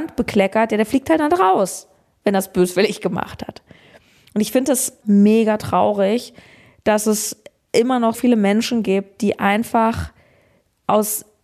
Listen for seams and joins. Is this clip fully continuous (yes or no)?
no